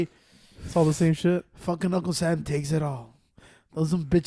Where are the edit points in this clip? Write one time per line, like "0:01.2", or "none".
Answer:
none

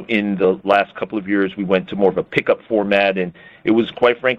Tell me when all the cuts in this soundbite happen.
none

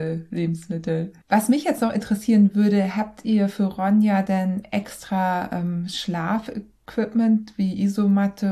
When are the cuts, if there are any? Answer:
0:01.2

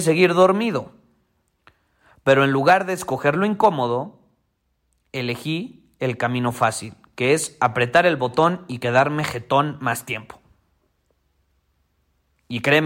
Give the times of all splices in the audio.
none

